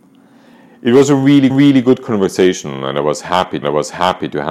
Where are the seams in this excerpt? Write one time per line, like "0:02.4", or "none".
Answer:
0:01.5
0:03.6